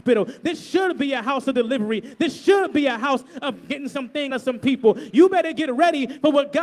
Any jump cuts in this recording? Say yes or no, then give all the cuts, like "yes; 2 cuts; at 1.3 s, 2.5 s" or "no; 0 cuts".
yes; 1 cut; at 4.3 s